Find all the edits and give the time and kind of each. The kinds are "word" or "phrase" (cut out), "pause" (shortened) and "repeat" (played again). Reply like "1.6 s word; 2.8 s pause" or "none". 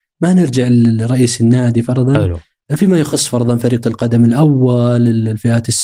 3.8 s word